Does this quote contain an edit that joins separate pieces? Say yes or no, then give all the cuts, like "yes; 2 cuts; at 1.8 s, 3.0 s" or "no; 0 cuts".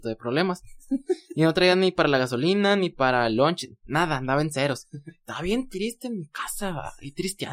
no; 0 cuts